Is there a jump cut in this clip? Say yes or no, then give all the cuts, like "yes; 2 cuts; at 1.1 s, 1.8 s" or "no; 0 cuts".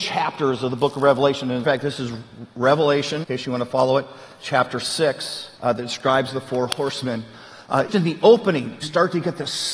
yes; 5 cuts; at 1.6 s, 3.2 s, 5.6 s, 7.9 s, 8.8 s